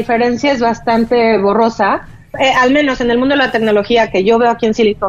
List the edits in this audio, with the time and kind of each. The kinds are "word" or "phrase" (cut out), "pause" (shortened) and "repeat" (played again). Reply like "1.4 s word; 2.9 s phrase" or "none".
none